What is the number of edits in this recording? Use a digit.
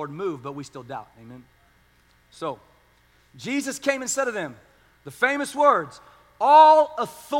0